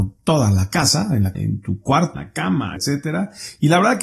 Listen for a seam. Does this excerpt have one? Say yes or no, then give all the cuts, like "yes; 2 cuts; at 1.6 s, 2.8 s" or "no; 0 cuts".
yes; 3 cuts; at 1.3 s, 2.1 s, 2.8 s